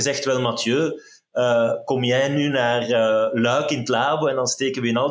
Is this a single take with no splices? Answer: yes; 0 cuts

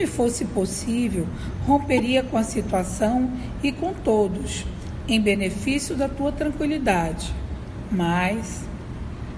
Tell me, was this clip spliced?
no; 0 cuts

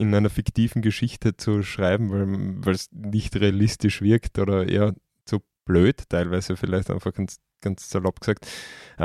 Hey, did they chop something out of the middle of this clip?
no; 0 cuts

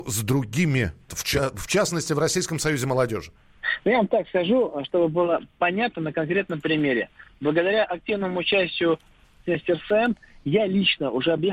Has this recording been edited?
yes; 1 cut; at 1.1 s

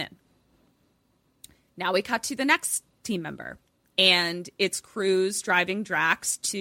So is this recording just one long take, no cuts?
yes; 0 cuts

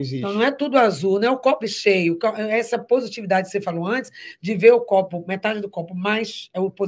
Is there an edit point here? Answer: yes; 1 cut; at 1.6 s

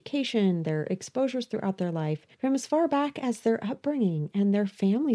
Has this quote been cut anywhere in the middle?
yes; 1 cut; at 2.3 s

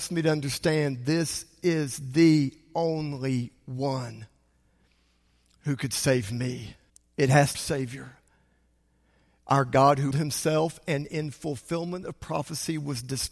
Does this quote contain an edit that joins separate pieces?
yes; 3 cuts; at 6.9 s, 7.5 s, 10.1 s

